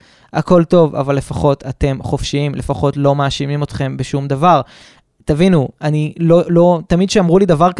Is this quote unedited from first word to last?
yes; 0 cuts

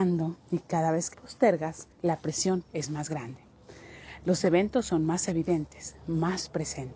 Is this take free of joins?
no; 3 cuts; at 1.1 s, 1.9 s, 2.7 s

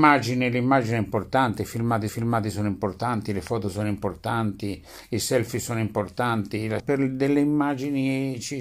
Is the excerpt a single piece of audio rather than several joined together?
no; 2 cuts; at 2.1 s, 6.8 s

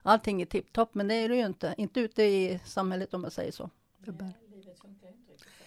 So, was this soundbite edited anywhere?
no; 0 cuts

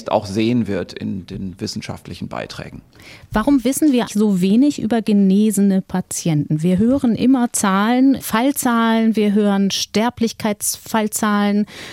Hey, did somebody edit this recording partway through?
yes; 1 cut; at 4.1 s

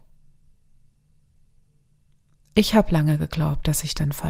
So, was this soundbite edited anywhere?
no; 0 cuts

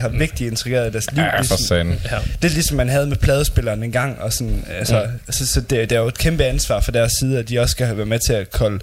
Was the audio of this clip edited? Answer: no; 0 cuts

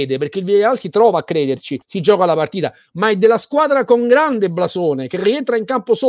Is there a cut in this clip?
yes; 1 cut; at 1.8 s

